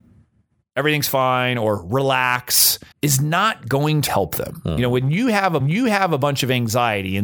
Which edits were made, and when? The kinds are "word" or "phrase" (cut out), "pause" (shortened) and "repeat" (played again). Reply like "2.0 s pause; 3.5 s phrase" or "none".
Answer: 2.9 s pause; 4.1 s word; 5.6 s repeat